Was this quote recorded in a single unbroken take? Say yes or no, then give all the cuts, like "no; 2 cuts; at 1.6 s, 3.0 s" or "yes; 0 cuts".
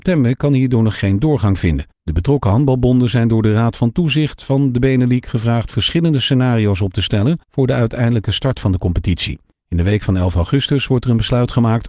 no; 3 cuts; at 1.9 s, 7.4 s, 9.5 s